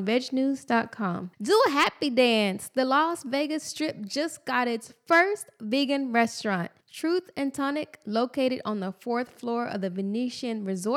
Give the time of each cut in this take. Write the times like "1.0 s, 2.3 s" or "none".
1.3 s, 6.8 s